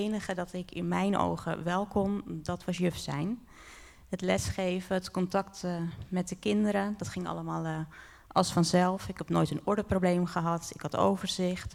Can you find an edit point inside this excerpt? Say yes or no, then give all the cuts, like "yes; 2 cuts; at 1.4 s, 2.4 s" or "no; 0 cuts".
no; 0 cuts